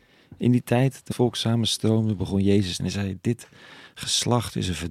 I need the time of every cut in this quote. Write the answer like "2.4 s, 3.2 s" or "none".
1.1 s, 2.8 s